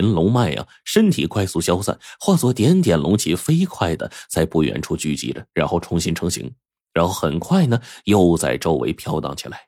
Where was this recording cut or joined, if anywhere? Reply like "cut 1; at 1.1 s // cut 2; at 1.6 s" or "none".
none